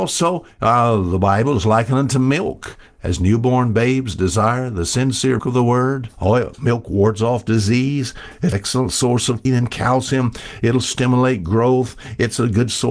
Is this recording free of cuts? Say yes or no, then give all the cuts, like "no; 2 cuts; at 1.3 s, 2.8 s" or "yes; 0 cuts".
no; 4 cuts; at 5.4 s, 6.1 s, 8.5 s, 9.5 s